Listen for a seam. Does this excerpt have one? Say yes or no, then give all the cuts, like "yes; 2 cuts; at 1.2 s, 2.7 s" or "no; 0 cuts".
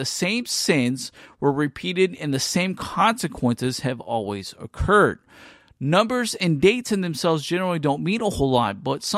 no; 0 cuts